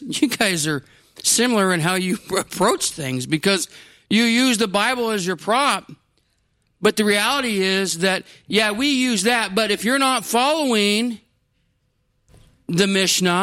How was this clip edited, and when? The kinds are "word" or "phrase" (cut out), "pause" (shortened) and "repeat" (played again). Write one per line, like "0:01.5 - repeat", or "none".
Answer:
none